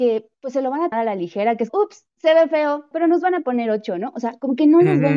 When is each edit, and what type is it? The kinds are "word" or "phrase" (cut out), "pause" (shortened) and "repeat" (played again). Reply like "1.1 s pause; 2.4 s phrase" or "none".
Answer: 0.9 s word; 1.7 s word; 2.9 s word